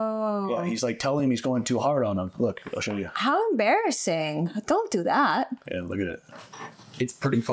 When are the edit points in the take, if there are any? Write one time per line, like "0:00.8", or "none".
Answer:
none

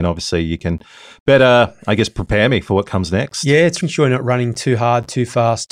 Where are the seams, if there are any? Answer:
0:03.8

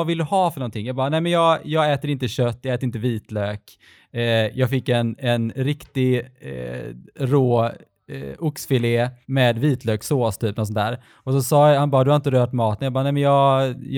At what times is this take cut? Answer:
0:09.2

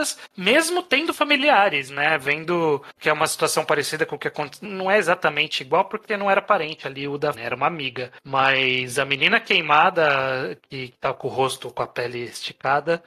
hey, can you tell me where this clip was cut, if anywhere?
0:04.6
0:07.3

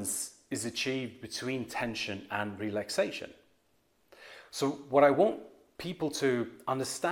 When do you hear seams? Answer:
none

